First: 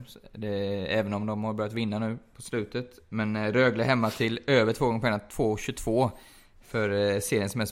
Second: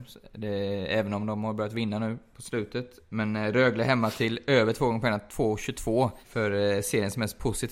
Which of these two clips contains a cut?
second; 1 cut; at 6.2 s

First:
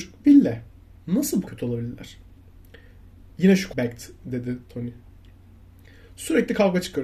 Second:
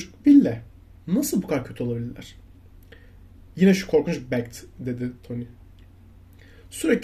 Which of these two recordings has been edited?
first; 2 cuts; at 1.5 s, 3.7 s

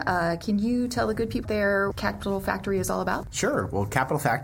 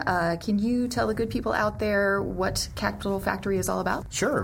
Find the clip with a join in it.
first; 2 cuts; at 1.4 s, 1.9 s

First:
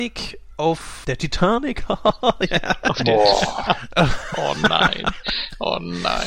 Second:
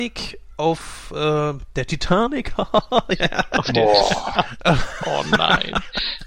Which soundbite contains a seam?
first; 1 cut; at 1.0 s

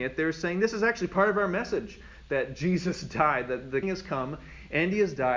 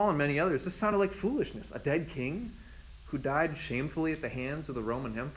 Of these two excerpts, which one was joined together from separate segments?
first; 1 cut; at 3.8 s

